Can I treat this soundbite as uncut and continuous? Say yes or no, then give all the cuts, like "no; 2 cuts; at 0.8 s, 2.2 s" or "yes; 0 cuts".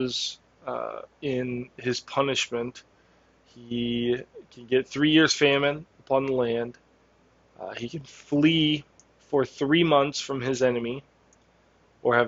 yes; 0 cuts